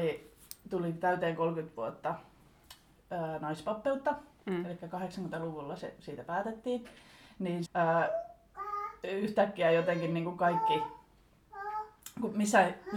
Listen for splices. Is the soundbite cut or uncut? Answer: cut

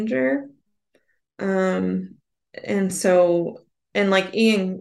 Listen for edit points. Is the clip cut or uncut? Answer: uncut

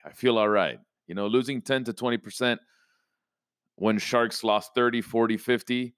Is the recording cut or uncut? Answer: uncut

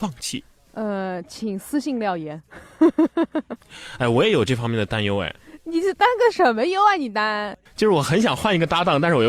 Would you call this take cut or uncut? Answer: cut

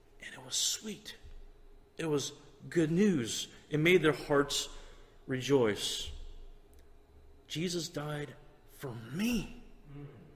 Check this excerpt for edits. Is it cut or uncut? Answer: uncut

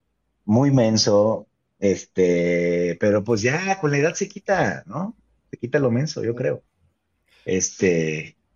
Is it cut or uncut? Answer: uncut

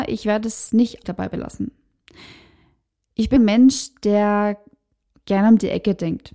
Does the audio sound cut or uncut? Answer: cut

